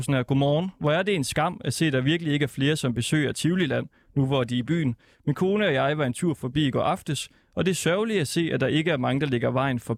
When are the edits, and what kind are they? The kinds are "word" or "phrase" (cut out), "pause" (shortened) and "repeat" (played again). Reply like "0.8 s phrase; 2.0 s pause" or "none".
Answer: none